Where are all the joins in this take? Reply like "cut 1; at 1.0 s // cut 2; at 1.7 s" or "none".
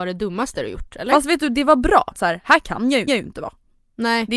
cut 1; at 2.1 s // cut 2; at 3.1 s